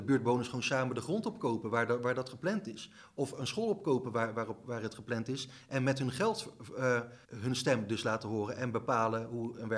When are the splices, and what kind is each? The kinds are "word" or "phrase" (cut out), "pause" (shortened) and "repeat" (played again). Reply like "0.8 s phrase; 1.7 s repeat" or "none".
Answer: 7.2 s pause

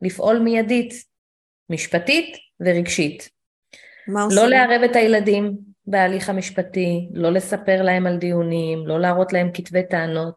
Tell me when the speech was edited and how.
none

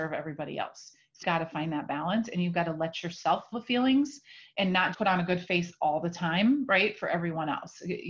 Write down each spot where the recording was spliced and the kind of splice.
1.2 s word; 3.5 s word; 4.9 s word

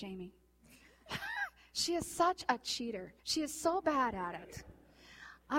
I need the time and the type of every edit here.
3.2 s pause

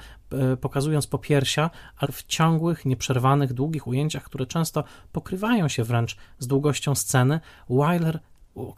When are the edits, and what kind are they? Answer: 2.0 s word

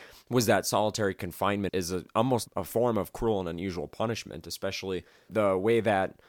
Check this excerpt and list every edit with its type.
1.7 s word; 2.5 s word; 5.3 s word

